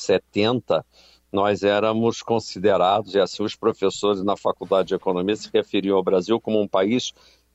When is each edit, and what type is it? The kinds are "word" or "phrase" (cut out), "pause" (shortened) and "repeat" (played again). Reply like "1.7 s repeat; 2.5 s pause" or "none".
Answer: none